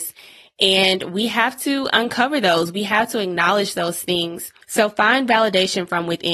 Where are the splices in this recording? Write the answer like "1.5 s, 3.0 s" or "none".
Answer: 4.6 s